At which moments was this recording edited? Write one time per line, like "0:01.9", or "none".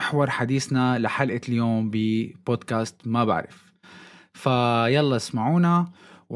none